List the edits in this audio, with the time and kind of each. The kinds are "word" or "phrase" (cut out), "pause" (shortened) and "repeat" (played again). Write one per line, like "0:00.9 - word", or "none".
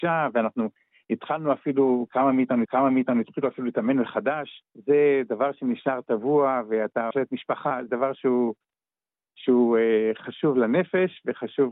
0:02.7 - repeat
0:04.7 - pause
0:07.1 - word
0:07.9 - word